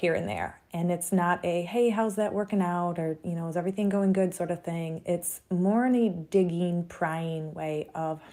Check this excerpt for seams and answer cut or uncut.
uncut